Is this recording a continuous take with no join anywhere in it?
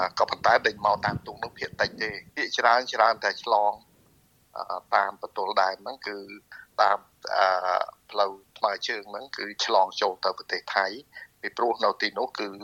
no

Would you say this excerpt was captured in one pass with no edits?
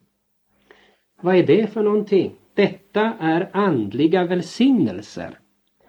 yes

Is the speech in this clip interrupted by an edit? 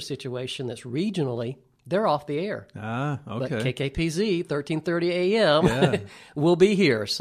no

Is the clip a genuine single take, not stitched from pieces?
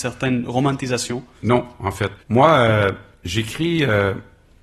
no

